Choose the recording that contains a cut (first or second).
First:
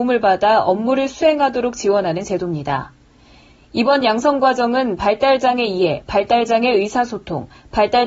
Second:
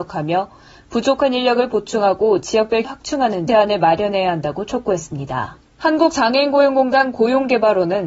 second